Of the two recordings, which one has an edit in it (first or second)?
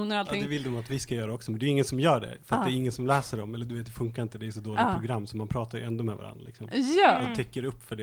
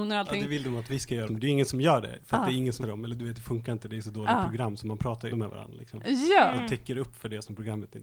second